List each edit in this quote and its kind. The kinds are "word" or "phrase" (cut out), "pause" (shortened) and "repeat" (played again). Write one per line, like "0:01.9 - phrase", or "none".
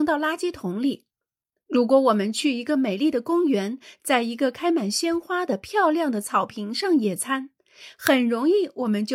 none